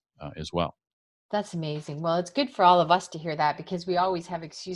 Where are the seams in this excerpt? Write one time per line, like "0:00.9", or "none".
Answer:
0:01.0